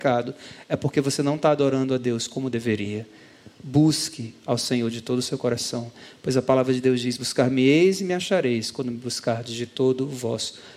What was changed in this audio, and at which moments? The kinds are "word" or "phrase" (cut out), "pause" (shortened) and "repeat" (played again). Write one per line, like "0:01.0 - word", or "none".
none